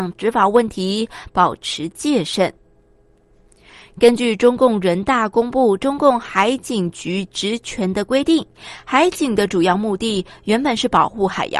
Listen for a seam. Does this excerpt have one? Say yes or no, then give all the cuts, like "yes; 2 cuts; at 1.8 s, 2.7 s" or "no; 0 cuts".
no; 0 cuts